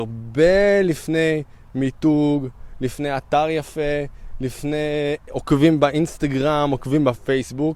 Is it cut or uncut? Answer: uncut